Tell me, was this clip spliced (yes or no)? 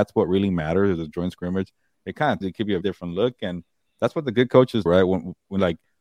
yes